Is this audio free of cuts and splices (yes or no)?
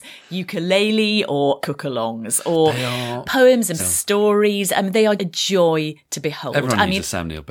no